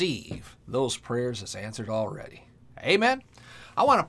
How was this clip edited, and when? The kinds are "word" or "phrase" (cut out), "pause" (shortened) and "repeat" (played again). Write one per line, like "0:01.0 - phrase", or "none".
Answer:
none